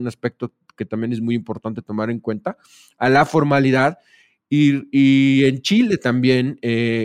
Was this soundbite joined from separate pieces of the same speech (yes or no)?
no